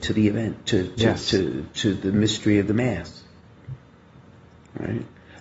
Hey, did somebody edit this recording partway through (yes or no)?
no